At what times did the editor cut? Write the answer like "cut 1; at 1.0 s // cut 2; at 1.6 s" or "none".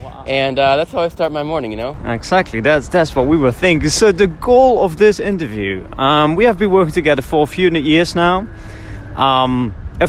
none